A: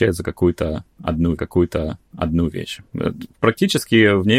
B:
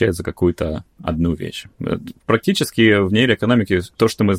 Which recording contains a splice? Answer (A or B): A